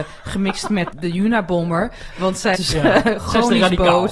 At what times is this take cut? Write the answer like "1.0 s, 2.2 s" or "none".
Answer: 0.9 s, 2.5 s